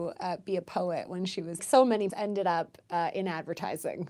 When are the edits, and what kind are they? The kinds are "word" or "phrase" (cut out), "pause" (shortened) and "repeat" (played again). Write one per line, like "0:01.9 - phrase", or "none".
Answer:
0:01.6 - phrase
0:02.1 - word